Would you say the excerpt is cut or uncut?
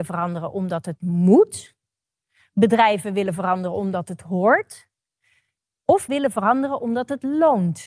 cut